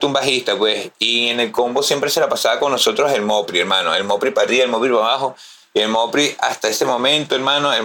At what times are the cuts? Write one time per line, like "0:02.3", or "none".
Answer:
none